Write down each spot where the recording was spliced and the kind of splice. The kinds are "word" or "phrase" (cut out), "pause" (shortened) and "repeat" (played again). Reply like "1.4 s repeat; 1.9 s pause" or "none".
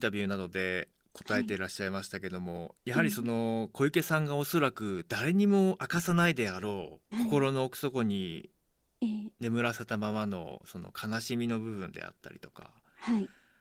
2.8 s pause; 7.0 s pause